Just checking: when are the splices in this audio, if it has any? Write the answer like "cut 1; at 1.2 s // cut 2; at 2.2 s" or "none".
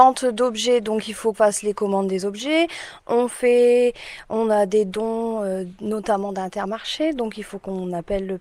cut 1; at 1.3 s